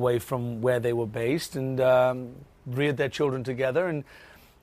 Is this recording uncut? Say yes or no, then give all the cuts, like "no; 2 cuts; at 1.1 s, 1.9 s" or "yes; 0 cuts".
yes; 0 cuts